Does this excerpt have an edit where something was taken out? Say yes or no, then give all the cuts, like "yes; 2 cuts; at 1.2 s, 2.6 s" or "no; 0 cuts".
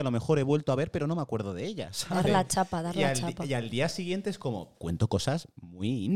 yes; 1 cut; at 4.7 s